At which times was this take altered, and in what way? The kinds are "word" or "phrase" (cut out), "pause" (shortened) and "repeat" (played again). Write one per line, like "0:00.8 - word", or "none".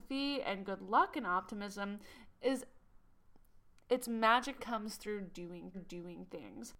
0:03.7 - pause
0:04.6 - word
0:05.7 - repeat